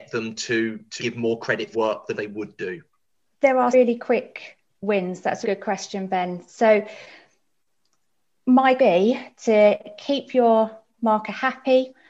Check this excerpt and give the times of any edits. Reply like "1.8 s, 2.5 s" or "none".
1.0 s, 1.7 s, 2.1 s, 3.1 s, 3.7 s, 5.4 s, 8.8 s